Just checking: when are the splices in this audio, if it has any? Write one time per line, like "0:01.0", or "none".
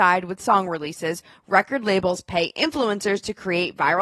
none